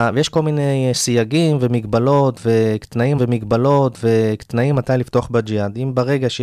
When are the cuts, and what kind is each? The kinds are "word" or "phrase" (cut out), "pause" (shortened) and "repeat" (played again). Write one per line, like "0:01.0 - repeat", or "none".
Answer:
0:03.2 - repeat